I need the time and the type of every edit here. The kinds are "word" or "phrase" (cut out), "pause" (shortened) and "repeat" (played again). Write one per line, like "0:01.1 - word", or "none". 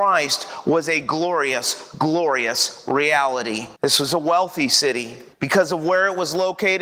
0:03.8 - pause
0:05.3 - pause